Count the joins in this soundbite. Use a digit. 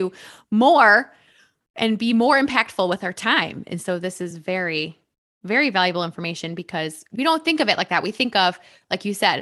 0